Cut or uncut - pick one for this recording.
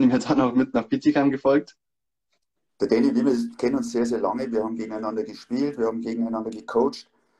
uncut